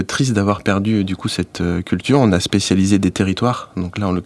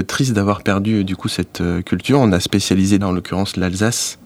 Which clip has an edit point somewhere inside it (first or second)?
second